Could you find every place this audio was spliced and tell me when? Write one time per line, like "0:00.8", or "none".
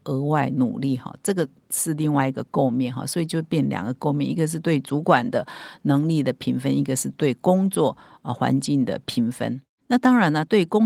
none